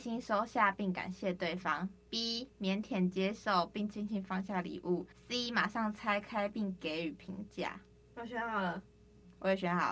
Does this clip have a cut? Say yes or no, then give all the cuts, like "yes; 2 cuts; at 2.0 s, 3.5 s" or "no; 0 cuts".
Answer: yes; 1 cut; at 5.1 s